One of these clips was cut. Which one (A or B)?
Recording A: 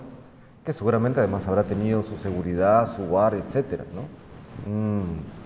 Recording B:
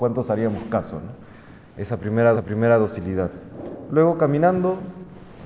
B